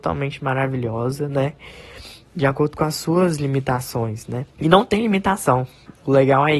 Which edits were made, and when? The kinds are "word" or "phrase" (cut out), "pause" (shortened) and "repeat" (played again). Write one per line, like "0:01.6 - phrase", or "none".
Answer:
0:04.5 - pause